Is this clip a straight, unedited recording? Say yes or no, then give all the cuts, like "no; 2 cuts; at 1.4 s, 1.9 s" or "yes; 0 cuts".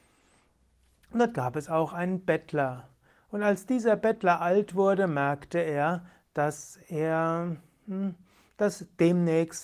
yes; 0 cuts